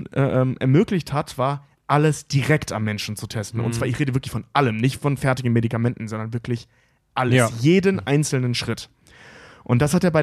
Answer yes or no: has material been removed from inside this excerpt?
no